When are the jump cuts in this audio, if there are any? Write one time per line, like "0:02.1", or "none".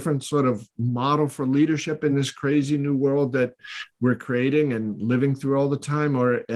none